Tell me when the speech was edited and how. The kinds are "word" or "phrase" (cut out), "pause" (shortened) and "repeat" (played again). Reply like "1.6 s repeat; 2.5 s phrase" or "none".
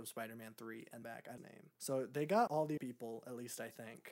1.0 s phrase; 1.4 s phrase; 1.7 s pause; 2.5 s word; 2.8 s word